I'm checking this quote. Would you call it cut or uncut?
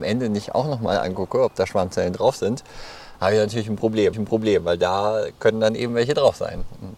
cut